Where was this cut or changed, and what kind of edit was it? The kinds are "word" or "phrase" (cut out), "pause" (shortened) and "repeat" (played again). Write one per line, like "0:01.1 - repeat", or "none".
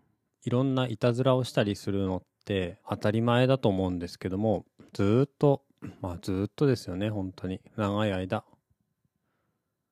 0:02.8 - pause
0:04.9 - pause
0:07.7 - pause